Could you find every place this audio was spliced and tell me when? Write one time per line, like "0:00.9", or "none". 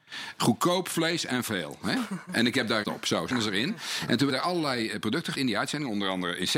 0:02.8
0:03.3
0:04.3
0:05.3